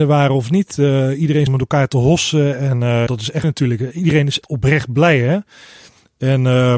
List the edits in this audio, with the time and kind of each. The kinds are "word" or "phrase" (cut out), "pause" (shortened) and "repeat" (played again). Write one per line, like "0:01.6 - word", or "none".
0:01.5 - word
0:03.1 - word
0:03.4 - word
0:04.4 - word